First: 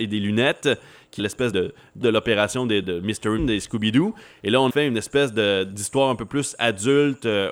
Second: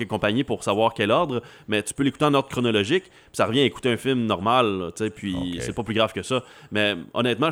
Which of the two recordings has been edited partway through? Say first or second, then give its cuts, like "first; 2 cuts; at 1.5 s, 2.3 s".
first; 6 cuts; at 1.2 s, 1.5 s, 2.0 s, 2.8 s, 3.4 s, 4.7 s